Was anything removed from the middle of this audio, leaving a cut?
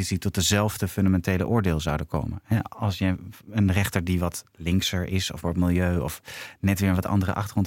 yes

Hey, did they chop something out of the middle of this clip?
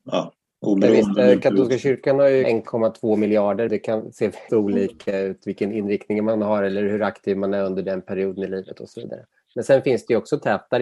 yes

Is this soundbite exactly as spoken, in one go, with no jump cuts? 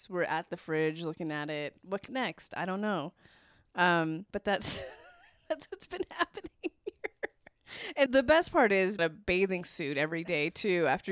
no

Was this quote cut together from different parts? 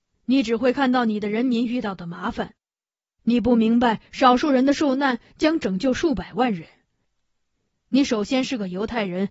no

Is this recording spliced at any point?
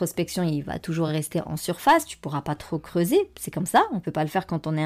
no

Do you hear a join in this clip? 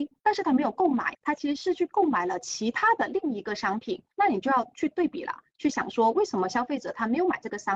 yes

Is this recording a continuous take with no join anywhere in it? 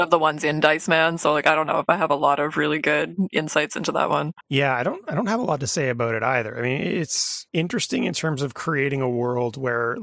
no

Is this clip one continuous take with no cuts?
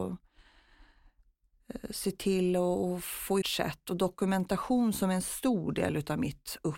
no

